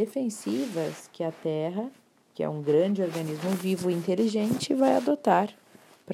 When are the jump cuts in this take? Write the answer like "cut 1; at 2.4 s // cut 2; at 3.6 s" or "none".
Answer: cut 1; at 2.2 s